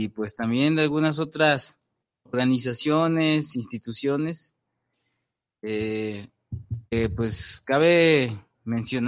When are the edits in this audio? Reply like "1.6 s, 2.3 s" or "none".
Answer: 2.0 s, 6.9 s